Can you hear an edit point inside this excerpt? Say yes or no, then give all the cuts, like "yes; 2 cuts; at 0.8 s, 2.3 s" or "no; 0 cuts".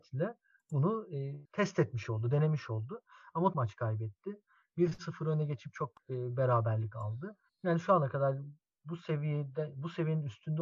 yes; 2 cuts; at 3.5 s, 7.5 s